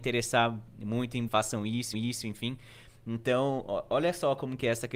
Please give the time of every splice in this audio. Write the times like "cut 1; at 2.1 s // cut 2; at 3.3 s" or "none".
cut 1; at 1.3 s // cut 2; at 1.9 s

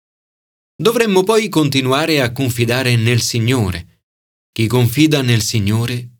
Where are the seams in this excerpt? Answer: none

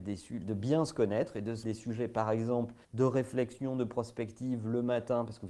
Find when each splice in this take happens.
cut 1; at 1.6 s // cut 2; at 2.8 s

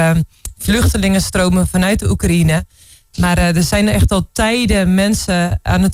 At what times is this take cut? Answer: none

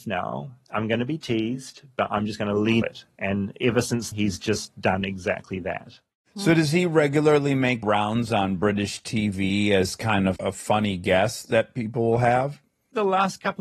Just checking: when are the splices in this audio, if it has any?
cut 1; at 2.8 s // cut 2; at 4.1 s // cut 3; at 7.8 s // cut 4; at 10.4 s

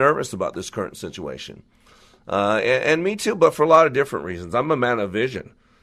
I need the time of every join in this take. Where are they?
none

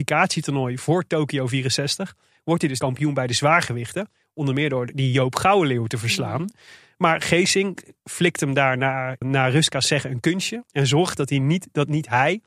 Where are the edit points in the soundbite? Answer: cut 1; at 2.8 s // cut 2; at 9.2 s

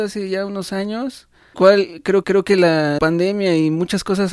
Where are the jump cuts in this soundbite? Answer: cut 1; at 1.5 s // cut 2; at 2.2 s // cut 3; at 3.0 s

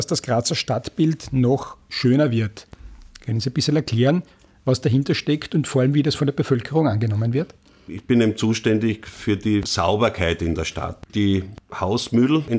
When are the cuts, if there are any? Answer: none

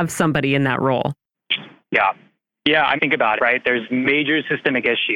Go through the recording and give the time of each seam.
cut 1; at 1.8 s // cut 2; at 3.0 s // cut 3; at 3.4 s // cut 4; at 3.9 s

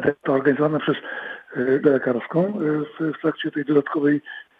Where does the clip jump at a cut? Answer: cut 1; at 1.8 s // cut 2; at 2.9 s

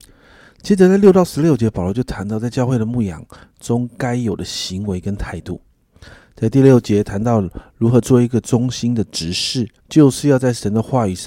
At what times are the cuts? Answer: cut 1; at 9.8 s

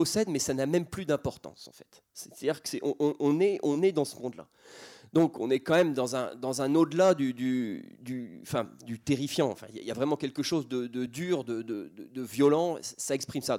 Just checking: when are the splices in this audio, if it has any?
none

